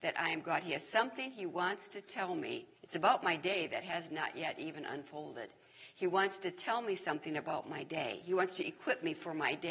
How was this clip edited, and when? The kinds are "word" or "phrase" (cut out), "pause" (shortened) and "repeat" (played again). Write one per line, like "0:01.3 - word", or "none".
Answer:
0:02.8 - pause